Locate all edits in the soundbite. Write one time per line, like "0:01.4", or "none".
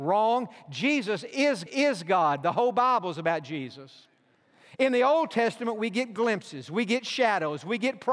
0:01.7